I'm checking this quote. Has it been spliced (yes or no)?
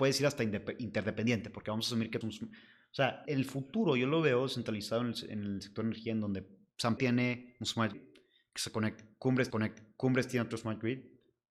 yes